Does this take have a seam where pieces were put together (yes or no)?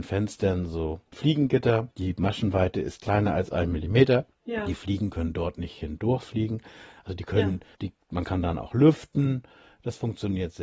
yes